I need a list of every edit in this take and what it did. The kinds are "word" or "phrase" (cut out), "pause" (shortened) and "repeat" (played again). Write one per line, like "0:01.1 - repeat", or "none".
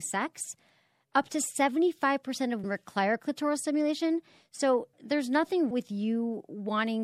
0:02.6 - word
0:04.9 - word
0:05.7 - word